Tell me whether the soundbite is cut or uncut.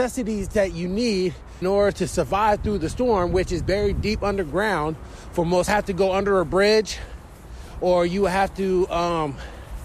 cut